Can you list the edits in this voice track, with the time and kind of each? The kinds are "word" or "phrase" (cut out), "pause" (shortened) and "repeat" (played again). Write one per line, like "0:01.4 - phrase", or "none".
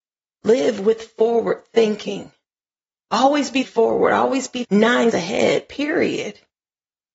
0:03.6 - word
0:04.6 - word
0:05.1 - word